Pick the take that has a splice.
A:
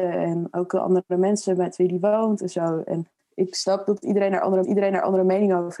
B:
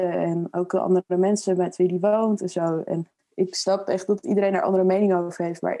A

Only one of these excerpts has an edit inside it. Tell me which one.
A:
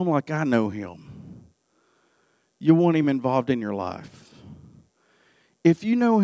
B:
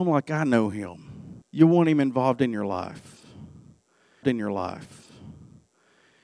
B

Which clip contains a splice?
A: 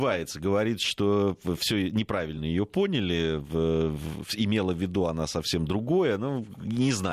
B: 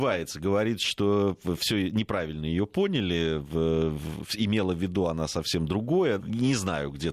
B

